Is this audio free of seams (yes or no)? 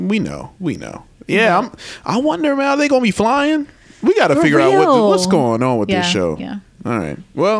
yes